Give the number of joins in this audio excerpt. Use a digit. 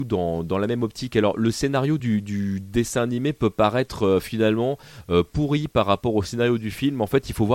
0